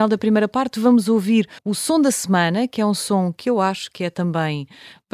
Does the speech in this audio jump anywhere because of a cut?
yes; 1 cut; at 1.6 s

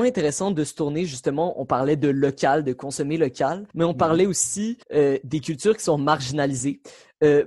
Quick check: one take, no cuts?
no; 2 cuts; at 3.7 s, 4.8 s

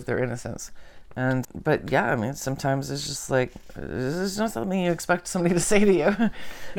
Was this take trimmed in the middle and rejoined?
yes; 1 cut; at 1.4 s

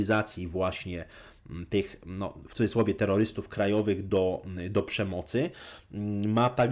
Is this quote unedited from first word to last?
yes; 0 cuts

